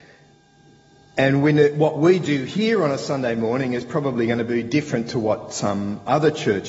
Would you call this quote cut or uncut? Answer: uncut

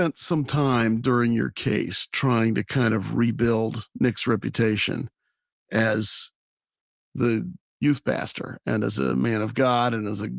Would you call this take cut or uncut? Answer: uncut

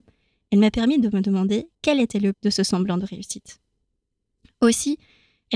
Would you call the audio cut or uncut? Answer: cut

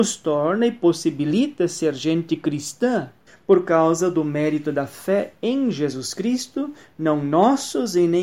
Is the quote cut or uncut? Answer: cut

